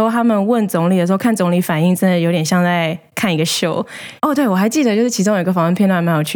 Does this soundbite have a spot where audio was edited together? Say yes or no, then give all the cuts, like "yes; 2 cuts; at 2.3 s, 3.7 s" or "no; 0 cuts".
yes; 1 cut; at 4.2 s